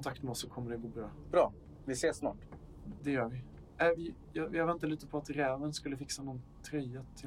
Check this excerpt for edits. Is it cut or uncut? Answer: uncut